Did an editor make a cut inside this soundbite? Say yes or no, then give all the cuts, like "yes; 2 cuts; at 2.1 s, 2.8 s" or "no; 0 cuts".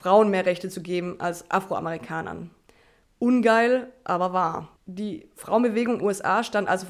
yes; 2 cuts; at 4.8 s, 6.0 s